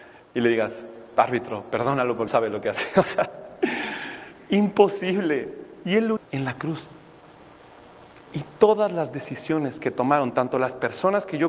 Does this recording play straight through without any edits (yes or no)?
no